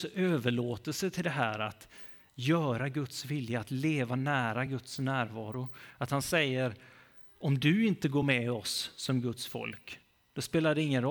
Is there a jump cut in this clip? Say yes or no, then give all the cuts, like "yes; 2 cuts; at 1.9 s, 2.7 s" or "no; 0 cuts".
no; 0 cuts